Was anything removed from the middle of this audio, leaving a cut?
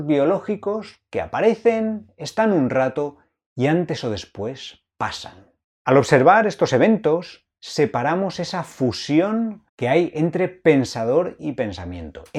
yes; 2 cuts; at 5.6 s, 9.7 s

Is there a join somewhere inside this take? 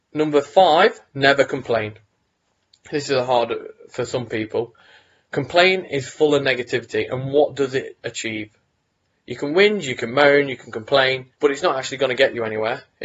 yes; 2 cuts; at 1.1 s, 11.3 s

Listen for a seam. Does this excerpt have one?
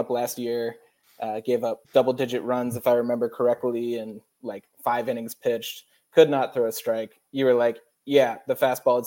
yes; 1 cut; at 1.8 s

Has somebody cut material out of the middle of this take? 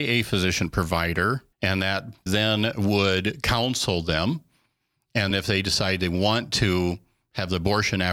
yes; 3 cuts; at 1.5 s, 2.3 s, 5.3 s

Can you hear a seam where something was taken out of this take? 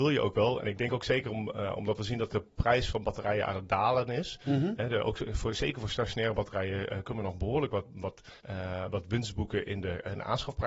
yes; 1 cut; at 8.4 s

